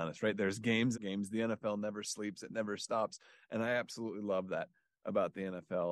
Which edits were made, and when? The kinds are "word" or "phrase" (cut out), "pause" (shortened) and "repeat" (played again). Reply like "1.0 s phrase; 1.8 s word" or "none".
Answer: 0.9 s phrase